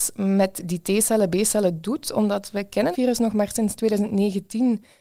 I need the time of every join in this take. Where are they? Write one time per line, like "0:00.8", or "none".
0:02.9
0:03.8